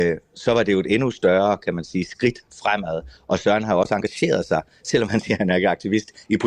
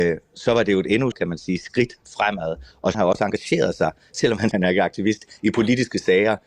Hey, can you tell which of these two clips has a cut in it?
second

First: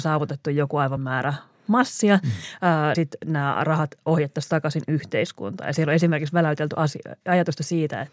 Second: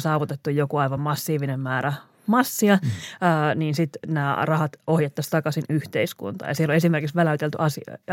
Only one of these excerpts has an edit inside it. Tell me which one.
first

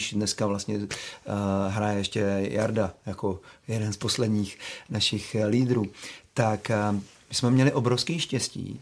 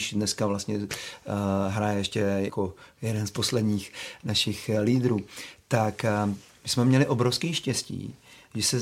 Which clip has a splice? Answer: second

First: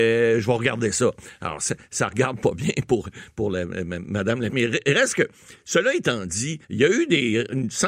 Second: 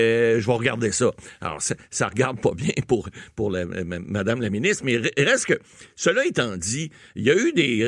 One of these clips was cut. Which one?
first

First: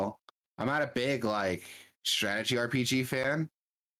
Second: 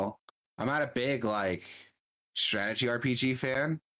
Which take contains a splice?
first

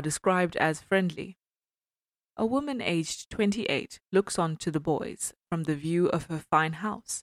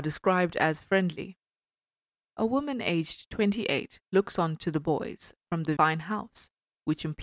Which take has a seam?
second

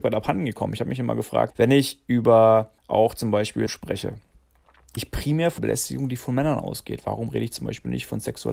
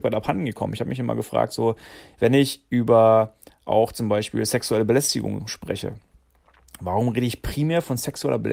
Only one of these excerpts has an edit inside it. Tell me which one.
first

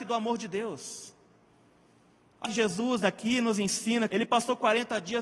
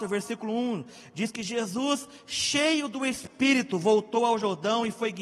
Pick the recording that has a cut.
first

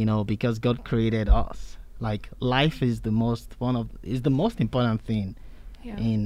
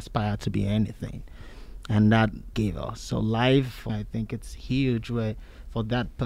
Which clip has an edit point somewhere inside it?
second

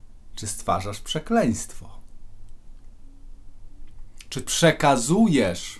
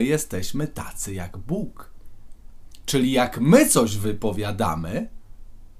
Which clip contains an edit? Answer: first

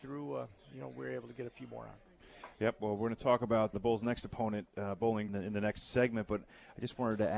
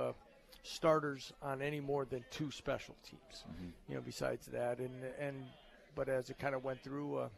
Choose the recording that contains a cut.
first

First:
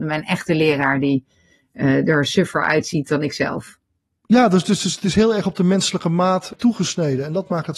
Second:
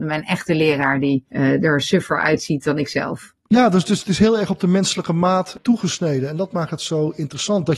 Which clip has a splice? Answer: second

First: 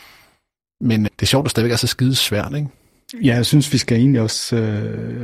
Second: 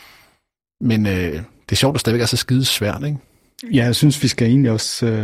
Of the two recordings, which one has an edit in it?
first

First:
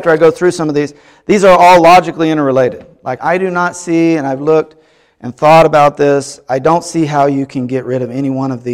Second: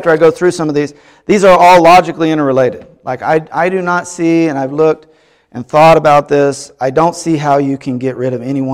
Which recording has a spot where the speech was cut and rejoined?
first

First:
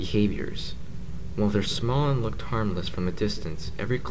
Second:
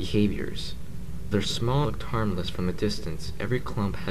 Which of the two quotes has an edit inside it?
second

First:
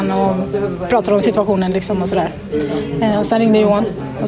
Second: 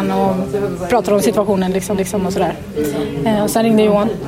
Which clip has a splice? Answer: second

